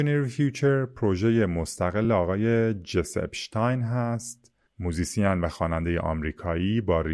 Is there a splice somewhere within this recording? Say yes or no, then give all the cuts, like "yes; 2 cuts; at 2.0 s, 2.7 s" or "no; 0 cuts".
no; 0 cuts